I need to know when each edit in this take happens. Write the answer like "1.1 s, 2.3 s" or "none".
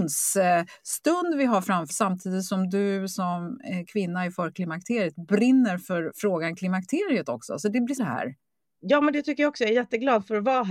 1.9 s, 8.0 s